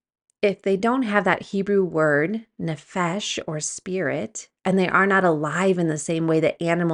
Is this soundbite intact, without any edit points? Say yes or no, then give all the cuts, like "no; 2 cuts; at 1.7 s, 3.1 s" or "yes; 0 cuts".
no; 1 cut; at 4.6 s